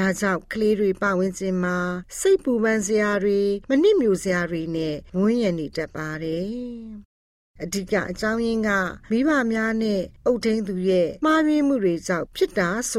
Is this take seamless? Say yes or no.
yes